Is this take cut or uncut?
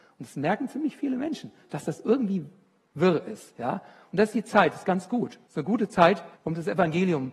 cut